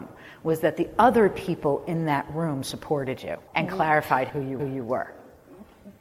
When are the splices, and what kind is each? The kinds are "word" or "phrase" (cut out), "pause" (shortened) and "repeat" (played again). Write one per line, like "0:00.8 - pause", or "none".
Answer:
0:03.5 - pause
0:04.3 - phrase
0:04.6 - repeat